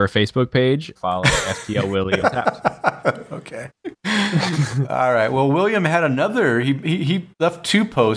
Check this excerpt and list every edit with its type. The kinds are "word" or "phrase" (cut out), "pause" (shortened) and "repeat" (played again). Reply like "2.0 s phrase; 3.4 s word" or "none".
1.0 s phrase; 2.2 s word